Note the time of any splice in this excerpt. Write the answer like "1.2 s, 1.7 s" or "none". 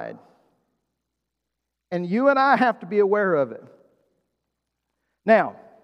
none